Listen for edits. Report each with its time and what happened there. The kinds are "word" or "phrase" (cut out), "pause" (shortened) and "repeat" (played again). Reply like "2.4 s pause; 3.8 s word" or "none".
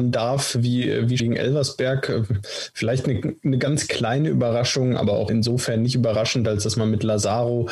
1.2 s word; 5.3 s word